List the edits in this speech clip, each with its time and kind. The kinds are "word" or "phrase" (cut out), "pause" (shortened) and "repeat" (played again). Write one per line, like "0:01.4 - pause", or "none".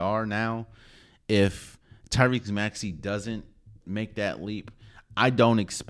0:03.8 - pause